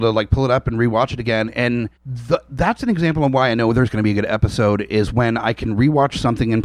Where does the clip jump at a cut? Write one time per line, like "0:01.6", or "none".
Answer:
0:02.0